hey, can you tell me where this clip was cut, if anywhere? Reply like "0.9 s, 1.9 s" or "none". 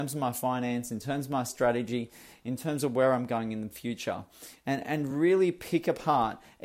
none